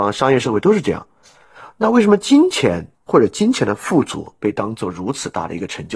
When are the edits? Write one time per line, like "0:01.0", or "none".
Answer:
0:02.9